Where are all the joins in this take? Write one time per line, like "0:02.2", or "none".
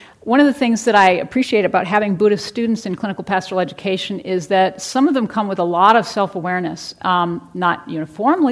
none